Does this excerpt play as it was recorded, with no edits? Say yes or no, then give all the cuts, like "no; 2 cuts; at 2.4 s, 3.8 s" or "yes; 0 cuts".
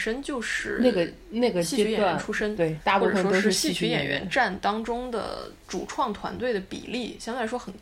no; 1 cut; at 2.8 s